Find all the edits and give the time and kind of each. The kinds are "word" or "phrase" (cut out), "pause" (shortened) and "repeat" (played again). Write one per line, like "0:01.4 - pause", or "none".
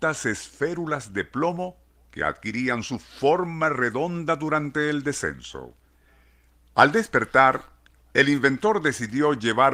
none